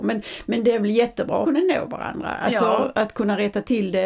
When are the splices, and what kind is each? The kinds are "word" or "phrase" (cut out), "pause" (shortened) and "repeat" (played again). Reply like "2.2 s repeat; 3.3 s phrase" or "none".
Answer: 1.4 s word